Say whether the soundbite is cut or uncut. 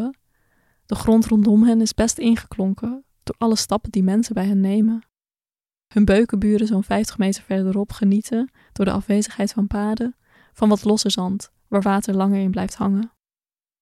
uncut